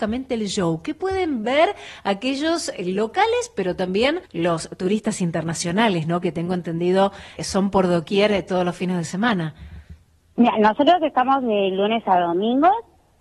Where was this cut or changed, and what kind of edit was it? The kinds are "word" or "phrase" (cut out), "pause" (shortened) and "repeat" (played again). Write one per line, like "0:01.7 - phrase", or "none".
0:04.3 - pause
0:07.4 - word
0:10.1 - pause